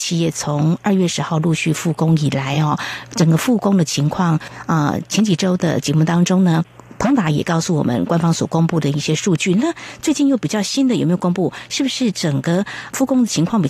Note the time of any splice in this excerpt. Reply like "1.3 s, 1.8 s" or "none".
none

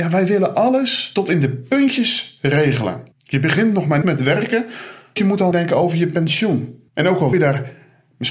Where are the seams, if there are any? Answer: 3.1 s, 4.0 s, 5.2 s, 5.5 s, 6.9 s, 7.3 s

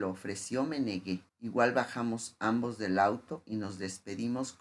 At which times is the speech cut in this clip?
1.3 s

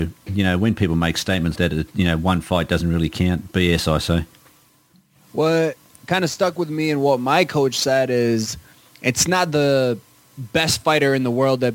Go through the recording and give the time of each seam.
1.6 s

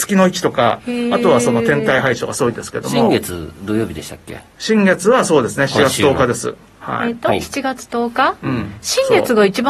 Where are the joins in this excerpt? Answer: none

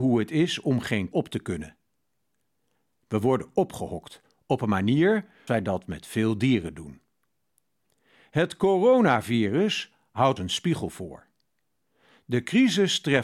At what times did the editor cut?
1.1 s, 5.5 s, 10.4 s

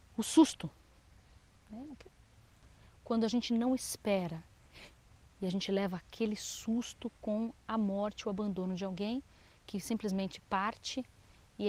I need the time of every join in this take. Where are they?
3.5 s

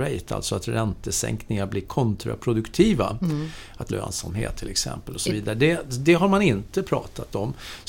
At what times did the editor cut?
3.9 s

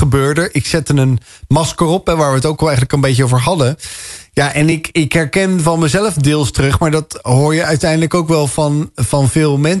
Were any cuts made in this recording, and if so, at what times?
none

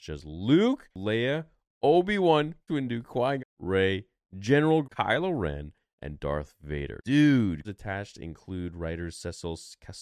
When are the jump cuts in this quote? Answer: 2.7 s, 3.4 s, 4.8 s, 7.6 s

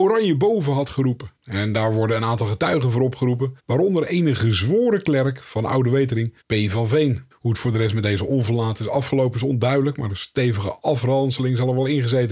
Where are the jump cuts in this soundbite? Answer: 1.4 s, 3.6 s, 6.4 s, 7.3 s

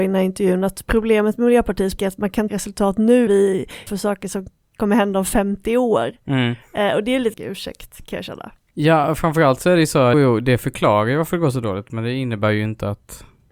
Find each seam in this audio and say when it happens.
2.0 s, 2.5 s, 3.3 s, 3.9 s, 7.3 s, 10.1 s

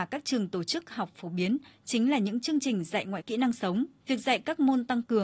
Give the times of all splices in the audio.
3.2 s, 4.0 s

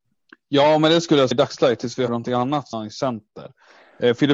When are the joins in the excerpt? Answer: 1.3 s, 2.1 s, 2.7 s

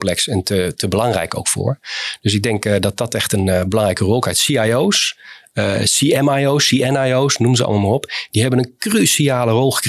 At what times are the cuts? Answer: none

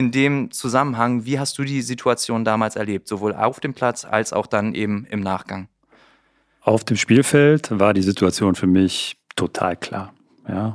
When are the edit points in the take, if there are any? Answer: none

